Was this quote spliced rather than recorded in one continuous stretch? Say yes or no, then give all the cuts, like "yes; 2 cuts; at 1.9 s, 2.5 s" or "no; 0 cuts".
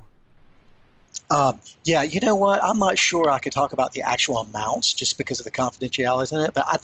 no; 0 cuts